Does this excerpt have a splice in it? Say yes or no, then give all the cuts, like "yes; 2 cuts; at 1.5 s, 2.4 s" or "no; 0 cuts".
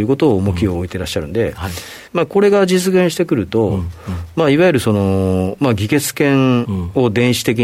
yes; 1 cut; at 2.1 s